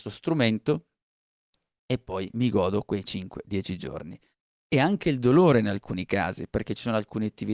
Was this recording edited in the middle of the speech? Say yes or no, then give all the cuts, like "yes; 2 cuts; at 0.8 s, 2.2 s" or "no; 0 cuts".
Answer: no; 0 cuts